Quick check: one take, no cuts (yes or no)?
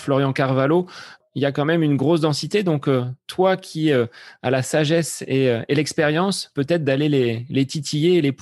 yes